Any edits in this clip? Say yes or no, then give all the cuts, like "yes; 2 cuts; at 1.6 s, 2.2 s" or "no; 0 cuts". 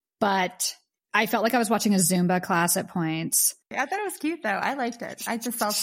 no; 0 cuts